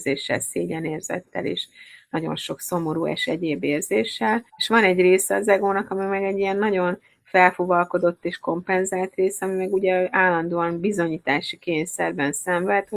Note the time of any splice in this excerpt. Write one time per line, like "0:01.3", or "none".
0:04.5